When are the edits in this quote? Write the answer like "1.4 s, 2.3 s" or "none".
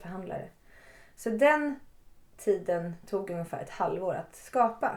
none